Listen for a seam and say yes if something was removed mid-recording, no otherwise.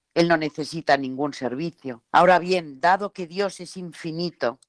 yes